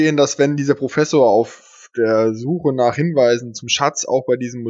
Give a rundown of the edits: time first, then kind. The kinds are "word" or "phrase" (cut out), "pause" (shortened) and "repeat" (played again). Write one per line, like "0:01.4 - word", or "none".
none